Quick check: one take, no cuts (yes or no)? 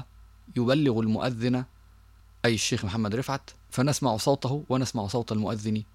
yes